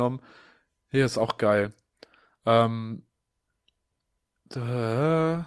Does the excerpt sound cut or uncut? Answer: uncut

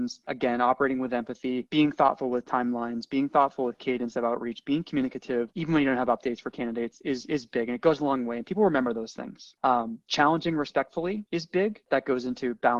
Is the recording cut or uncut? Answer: uncut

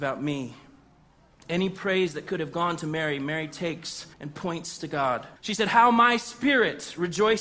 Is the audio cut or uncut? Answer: cut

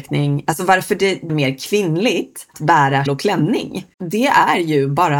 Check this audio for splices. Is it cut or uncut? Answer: cut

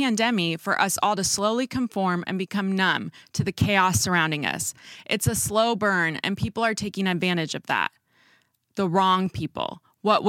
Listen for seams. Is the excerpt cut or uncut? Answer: uncut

